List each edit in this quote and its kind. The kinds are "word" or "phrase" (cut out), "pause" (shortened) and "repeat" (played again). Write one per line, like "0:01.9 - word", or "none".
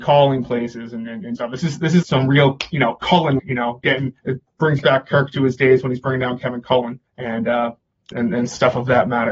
0:01.4 - phrase
0:02.0 - word
0:03.4 - word
0:04.2 - pause
0:07.1 - pause
0:08.1 - word